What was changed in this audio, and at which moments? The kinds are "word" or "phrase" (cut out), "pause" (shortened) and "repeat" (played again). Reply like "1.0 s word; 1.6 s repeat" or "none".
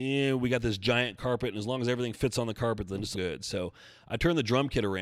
3.1 s word